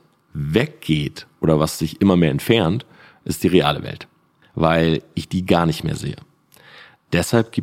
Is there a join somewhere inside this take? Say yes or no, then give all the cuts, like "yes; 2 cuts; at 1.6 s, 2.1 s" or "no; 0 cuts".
no; 0 cuts